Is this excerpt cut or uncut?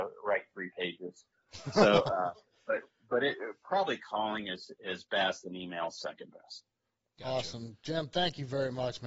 uncut